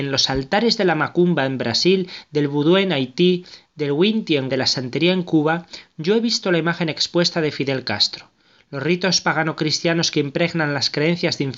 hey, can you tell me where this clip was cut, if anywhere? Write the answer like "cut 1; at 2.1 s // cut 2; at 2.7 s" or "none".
cut 1; at 4.5 s